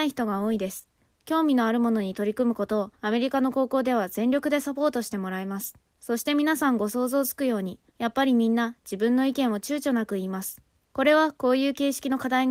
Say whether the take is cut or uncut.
cut